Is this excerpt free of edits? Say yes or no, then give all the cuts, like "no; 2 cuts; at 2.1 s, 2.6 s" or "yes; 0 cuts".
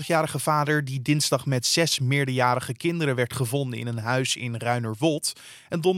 yes; 0 cuts